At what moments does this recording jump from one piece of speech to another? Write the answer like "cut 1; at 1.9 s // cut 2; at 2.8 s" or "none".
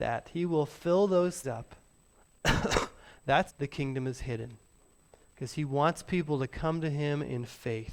cut 1; at 1.4 s // cut 2; at 1.9 s // cut 3; at 3.5 s